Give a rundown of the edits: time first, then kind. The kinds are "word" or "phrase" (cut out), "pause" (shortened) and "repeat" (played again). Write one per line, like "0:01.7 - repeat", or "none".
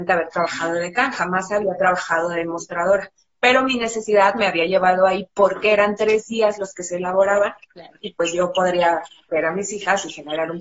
none